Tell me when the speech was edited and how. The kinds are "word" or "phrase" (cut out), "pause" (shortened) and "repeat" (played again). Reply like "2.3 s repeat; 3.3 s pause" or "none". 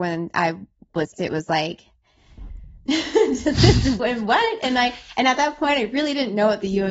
1.1 s word; 4.0 s word